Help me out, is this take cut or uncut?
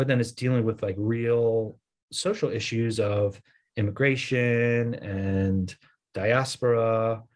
uncut